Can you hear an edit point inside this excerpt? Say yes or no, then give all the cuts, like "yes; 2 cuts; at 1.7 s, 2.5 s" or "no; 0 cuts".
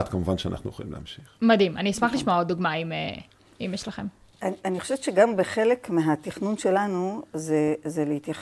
yes; 1 cut; at 3.4 s